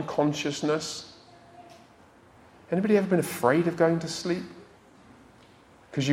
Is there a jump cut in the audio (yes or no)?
no